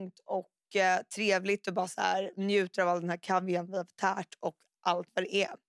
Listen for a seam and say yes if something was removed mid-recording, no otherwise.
no